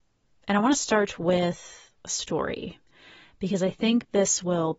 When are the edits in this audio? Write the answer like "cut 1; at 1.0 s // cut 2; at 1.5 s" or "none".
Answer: none